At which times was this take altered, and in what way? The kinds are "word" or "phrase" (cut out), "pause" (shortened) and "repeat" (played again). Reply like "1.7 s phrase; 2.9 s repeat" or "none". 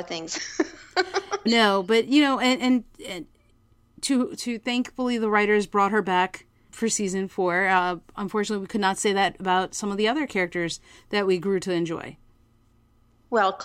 1.5 s word; 2.9 s pause; 6.7 s word